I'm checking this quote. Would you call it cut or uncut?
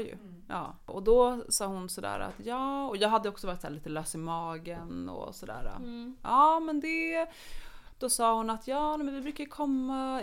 uncut